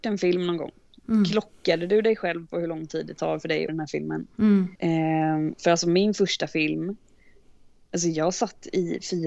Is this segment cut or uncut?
cut